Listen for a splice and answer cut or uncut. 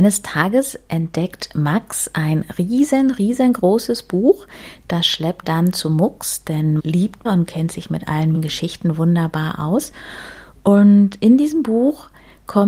cut